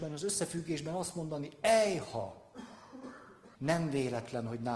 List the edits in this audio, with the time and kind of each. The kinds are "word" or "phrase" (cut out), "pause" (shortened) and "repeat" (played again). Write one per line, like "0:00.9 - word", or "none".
0:03.5 - pause